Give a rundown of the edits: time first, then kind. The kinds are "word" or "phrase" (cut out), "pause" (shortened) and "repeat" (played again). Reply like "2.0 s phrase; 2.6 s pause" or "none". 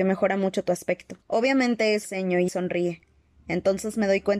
1.2 s pause; 2.0 s phrase; 2.5 s word